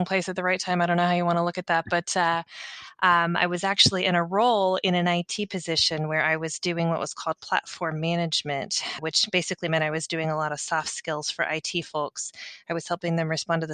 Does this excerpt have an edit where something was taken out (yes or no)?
yes